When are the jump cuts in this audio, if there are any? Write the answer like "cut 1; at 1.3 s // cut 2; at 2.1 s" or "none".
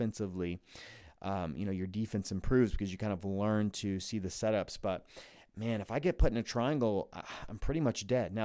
none